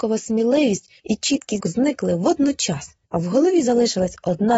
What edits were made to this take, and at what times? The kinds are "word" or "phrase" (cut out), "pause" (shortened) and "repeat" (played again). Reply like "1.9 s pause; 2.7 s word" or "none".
1.0 s word; 1.6 s word; 3.0 s pause